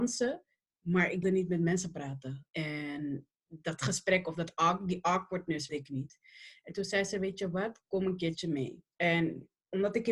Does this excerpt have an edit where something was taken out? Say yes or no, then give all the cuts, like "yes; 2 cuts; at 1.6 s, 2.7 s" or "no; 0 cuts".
yes; 4 cuts; at 1.2 s, 2.5 s, 5.7 s, 8.9 s